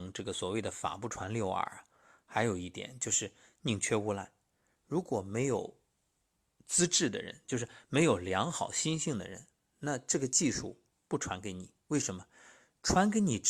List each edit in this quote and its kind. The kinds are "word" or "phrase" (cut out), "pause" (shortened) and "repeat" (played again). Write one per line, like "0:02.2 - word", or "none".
0:10.9 - pause

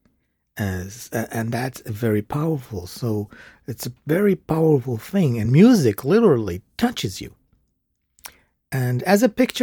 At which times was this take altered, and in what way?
none

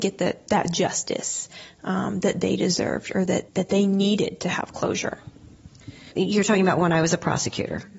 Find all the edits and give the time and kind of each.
0:03.5 - pause

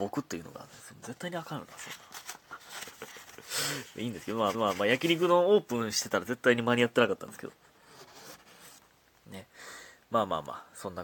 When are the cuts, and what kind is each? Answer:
0:04.5 - repeat

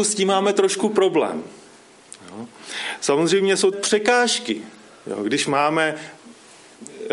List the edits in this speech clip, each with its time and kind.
0:03.7 - phrase

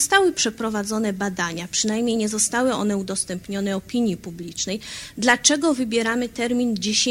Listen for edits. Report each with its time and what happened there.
none

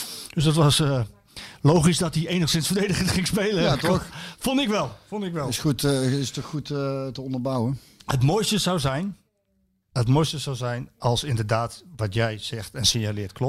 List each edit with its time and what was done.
none

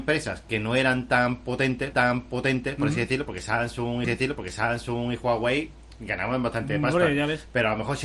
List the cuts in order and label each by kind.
0:01.9 - repeat
0:04.0 - repeat

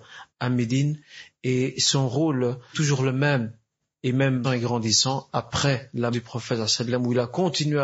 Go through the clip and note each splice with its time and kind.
0:02.7 - word
0:04.4 - word
0:06.1 - word

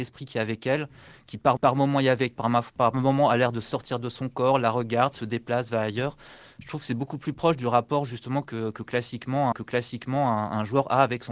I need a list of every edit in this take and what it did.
0:01.6 - repeat
0:02.4 - word
0:09.5 - repeat

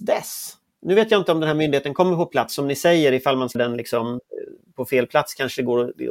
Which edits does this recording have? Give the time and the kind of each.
0:03.5 - word

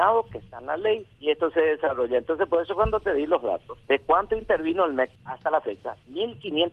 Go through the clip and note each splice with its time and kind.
0:01.1 - pause
0:03.8 - pause
0:05.2 - pause

